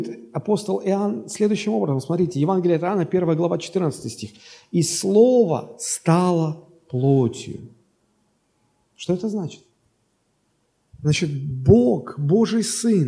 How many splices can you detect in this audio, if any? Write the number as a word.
zero